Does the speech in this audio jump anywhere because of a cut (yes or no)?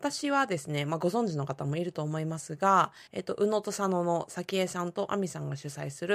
yes